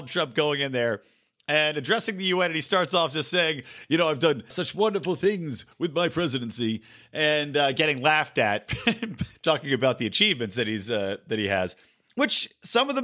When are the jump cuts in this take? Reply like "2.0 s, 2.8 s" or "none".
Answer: 4.5 s, 9.3 s